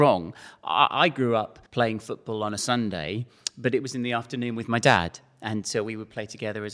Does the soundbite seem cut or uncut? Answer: cut